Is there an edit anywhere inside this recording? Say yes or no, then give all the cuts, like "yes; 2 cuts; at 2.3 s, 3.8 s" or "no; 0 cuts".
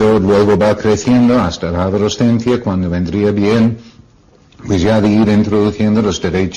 no; 0 cuts